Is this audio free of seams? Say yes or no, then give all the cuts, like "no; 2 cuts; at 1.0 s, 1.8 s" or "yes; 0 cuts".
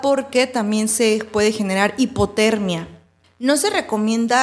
yes; 0 cuts